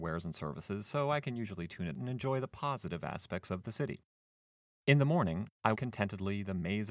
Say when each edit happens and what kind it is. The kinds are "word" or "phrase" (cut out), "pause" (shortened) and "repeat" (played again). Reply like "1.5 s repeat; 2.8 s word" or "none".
1.9 s word; 5.7 s word